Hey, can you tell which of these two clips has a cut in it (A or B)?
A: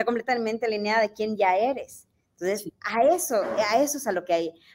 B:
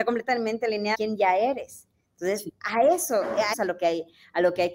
B